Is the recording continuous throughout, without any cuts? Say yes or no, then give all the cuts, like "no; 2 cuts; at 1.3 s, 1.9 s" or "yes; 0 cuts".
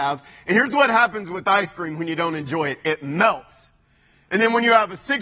yes; 0 cuts